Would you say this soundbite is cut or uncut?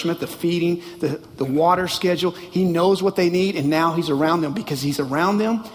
uncut